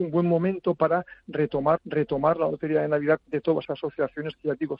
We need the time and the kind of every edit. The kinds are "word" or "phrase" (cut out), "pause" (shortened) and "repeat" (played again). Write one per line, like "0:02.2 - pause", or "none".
0:01.8 - repeat
0:03.2 - phrase
0:03.6 - word